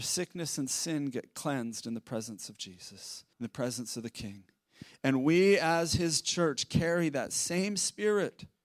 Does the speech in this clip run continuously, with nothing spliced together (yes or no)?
no